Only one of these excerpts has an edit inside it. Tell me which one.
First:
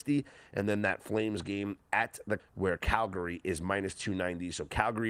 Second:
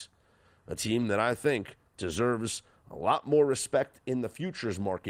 first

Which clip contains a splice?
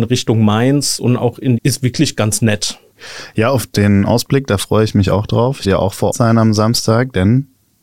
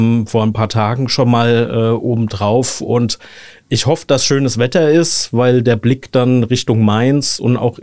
first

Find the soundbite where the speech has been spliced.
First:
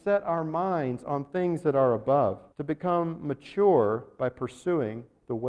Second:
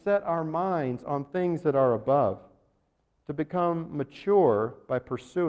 first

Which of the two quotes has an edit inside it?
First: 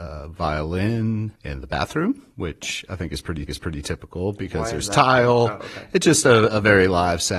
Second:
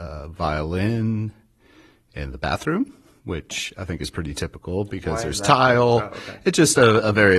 first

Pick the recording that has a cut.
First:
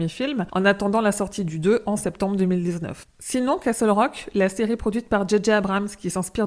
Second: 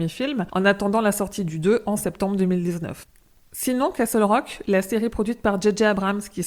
first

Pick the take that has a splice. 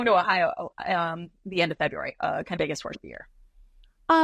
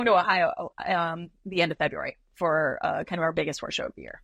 first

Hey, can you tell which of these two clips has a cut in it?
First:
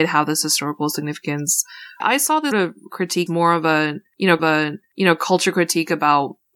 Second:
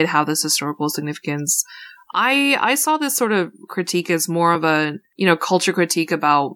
first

